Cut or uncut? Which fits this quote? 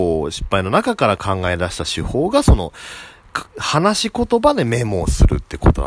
uncut